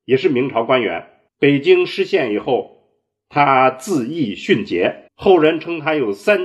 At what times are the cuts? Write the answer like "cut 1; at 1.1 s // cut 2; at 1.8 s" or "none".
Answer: cut 1; at 1.3 s // cut 2; at 5.1 s